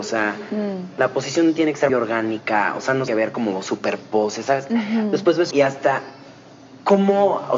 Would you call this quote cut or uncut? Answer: cut